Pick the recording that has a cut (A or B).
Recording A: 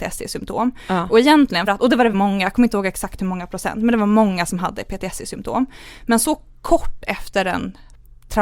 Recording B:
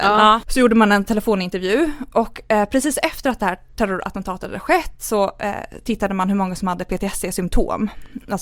A